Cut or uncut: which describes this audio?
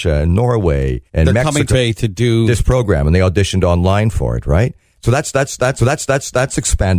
cut